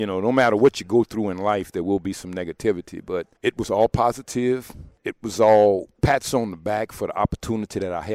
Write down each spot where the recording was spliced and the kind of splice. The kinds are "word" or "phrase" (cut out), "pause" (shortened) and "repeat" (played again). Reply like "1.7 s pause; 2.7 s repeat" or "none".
3.4 s pause; 5.0 s pause; 5.9 s pause